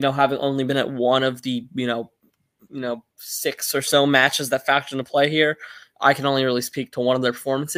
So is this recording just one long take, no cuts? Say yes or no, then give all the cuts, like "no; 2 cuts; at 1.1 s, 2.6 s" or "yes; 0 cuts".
yes; 0 cuts